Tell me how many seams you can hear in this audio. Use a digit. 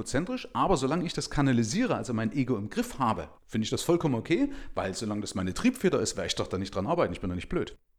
1